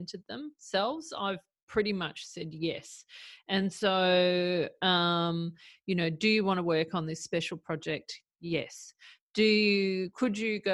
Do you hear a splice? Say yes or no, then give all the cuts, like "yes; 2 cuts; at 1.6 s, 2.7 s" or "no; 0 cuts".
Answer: no; 0 cuts